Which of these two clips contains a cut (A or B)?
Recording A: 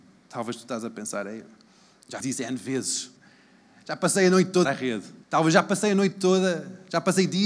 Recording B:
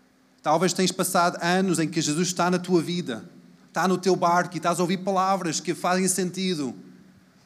A